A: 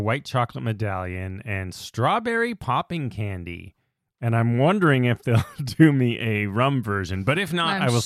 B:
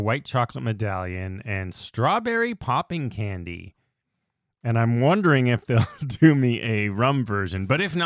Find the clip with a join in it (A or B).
A